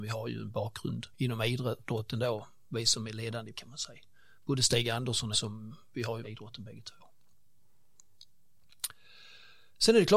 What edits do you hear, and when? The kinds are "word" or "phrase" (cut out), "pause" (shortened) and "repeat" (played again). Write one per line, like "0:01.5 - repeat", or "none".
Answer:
0:01.1 - pause
0:03.5 - word
0:05.3 - phrase
0:06.2 - phrase